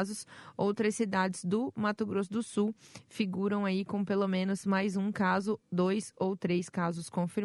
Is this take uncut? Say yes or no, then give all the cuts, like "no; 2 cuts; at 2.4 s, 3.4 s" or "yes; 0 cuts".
yes; 0 cuts